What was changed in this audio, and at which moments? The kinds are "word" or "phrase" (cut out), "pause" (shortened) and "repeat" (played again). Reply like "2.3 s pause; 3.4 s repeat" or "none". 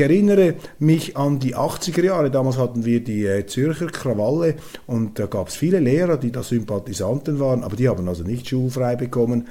none